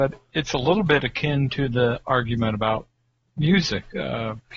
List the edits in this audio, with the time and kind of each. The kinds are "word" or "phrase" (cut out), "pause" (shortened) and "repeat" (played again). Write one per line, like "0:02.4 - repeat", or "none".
none